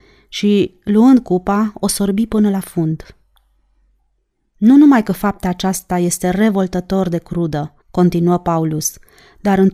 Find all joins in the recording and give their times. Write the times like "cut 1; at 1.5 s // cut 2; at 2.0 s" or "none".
cut 1; at 7.8 s